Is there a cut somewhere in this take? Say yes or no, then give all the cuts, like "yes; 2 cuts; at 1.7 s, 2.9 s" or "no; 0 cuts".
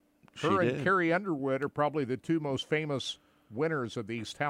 no; 0 cuts